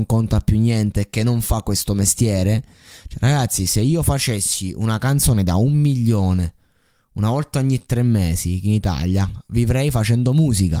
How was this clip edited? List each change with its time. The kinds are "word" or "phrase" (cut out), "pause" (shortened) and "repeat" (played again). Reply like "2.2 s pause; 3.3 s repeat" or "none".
none